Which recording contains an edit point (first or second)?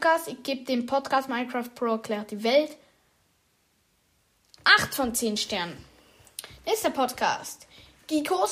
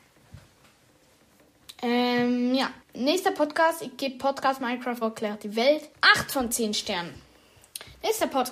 second